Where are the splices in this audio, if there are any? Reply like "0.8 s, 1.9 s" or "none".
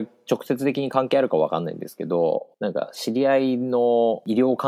2.5 s